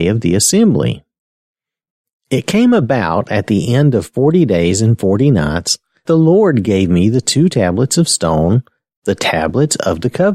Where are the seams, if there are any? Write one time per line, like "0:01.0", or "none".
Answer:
0:06.1